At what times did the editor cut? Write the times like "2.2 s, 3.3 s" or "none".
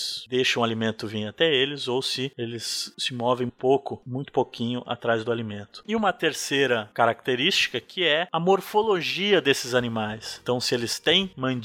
3.5 s